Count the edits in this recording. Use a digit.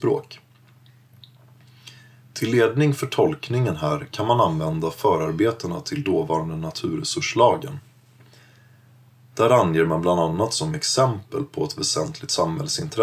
0